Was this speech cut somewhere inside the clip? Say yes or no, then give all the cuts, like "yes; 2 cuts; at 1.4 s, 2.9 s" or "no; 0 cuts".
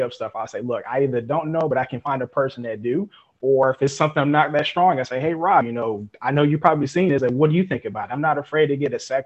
no; 0 cuts